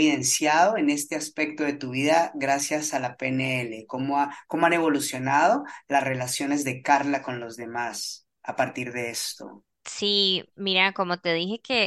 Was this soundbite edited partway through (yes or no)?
yes